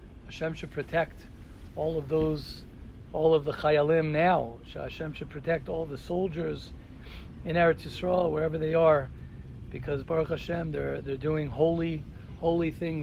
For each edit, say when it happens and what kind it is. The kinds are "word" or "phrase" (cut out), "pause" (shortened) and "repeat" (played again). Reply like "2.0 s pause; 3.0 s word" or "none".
none